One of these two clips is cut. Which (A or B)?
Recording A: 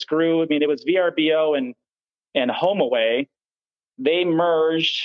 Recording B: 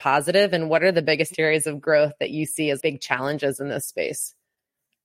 B